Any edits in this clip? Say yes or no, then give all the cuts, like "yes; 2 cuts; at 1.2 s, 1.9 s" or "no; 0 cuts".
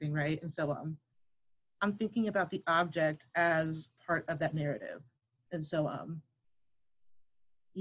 no; 0 cuts